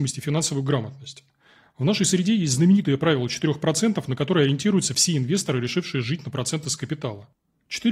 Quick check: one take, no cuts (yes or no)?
yes